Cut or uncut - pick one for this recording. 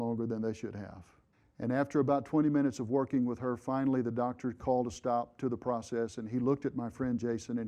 cut